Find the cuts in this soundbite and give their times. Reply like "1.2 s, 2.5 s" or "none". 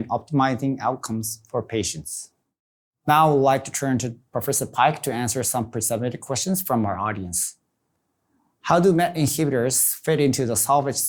none